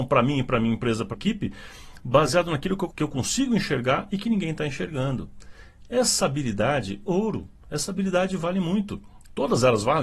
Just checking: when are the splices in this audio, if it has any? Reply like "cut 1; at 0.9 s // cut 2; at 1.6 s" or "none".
cut 1; at 1.1 s // cut 2; at 2.9 s // cut 3; at 7.0 s